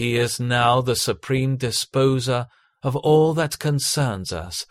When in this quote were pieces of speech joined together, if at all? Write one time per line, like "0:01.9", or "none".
none